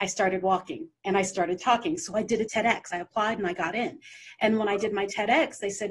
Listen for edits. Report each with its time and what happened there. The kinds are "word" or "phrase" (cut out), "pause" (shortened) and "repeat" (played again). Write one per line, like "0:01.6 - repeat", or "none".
0:02.5 - word